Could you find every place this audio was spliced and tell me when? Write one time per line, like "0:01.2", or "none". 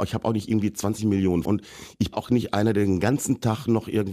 0:01.4
0:02.1